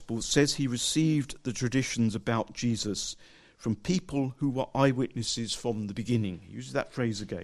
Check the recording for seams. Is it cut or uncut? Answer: uncut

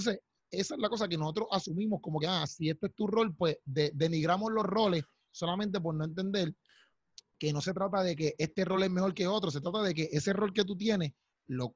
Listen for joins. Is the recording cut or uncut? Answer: uncut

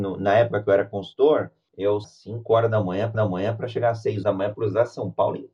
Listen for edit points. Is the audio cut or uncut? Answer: cut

